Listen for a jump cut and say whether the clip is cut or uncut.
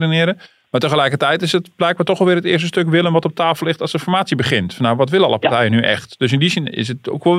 uncut